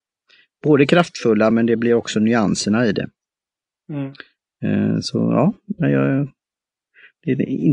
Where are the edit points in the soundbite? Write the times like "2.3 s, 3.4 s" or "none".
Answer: none